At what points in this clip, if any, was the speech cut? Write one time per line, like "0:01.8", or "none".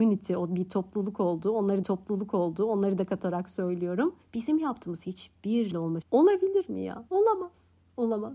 0:01.8
0:04.2
0:05.7
0:06.0
0:07.1